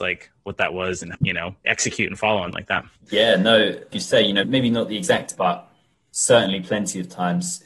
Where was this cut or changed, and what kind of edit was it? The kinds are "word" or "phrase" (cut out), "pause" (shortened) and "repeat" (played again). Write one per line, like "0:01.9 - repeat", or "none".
0:01.1 - word
0:01.6 - word
0:02.5 - word
0:03.9 - word
0:04.4 - word
0:05.3 - word